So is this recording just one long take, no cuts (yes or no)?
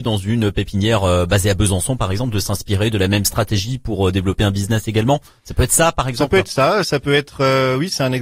yes